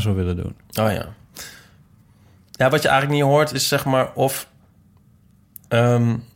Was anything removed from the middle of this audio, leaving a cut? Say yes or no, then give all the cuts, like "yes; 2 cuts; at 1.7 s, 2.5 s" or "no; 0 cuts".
no; 0 cuts